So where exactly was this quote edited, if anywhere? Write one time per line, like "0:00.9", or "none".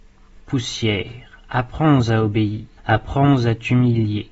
0:02.8